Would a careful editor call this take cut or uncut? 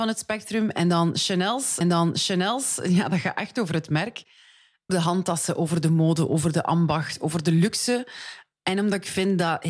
cut